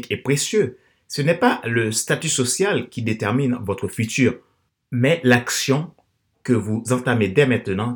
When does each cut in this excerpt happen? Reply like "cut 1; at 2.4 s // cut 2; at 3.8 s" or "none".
cut 1; at 4.7 s

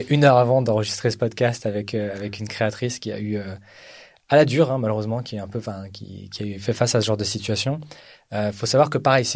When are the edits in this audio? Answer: none

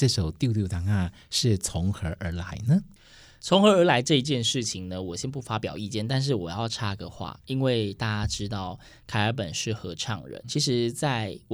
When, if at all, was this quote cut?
cut 1; at 10.4 s

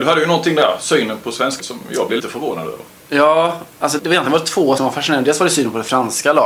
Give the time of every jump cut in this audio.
cut 1; at 1.2 s // cut 2; at 1.6 s // cut 3; at 2.2 s // cut 4; at 4.0 s // cut 5; at 4.8 s

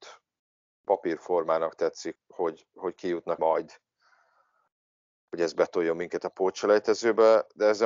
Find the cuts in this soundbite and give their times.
cut 1; at 2.2 s // cut 2; at 3.4 s

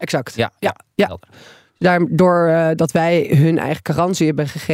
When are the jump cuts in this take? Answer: none

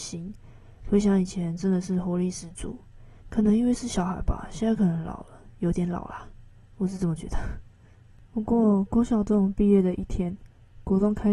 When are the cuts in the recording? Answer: cut 1; at 3.2 s

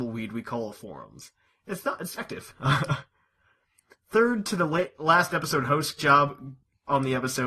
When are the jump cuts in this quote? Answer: cut 1; at 2.2 s // cut 2; at 6.0 s

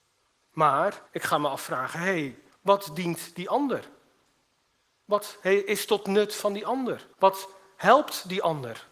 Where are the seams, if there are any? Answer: cut 1; at 1.1 s // cut 2; at 2.5 s // cut 3; at 7.1 s

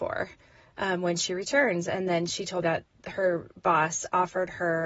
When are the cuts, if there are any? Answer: cut 1; at 2.6 s

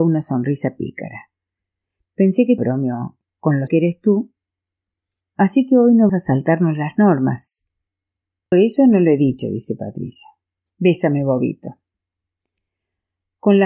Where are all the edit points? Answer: cut 1; at 2.6 s // cut 2; at 3.7 s // cut 3; at 6.1 s // cut 4; at 8.5 s

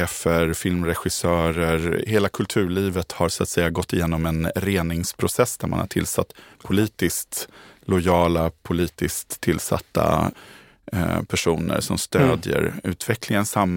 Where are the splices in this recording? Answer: none

